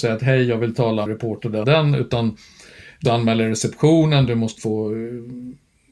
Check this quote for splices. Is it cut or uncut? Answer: cut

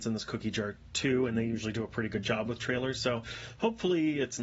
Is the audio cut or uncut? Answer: uncut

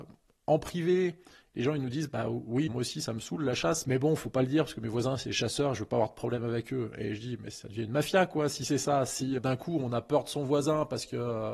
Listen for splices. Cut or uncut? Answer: cut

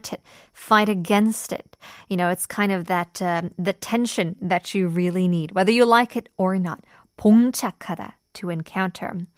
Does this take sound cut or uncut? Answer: uncut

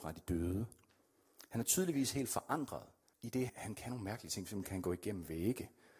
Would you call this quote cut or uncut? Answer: cut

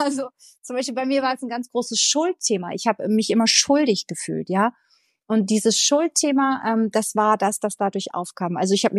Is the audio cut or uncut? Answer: uncut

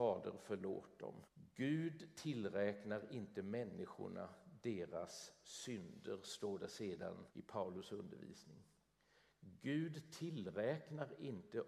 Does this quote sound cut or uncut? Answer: cut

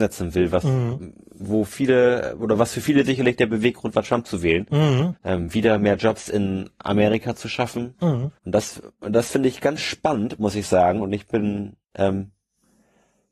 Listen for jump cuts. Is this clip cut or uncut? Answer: cut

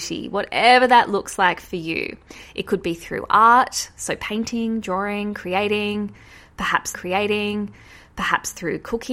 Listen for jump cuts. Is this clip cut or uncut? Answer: cut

